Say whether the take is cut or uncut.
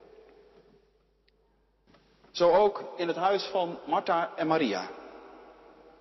uncut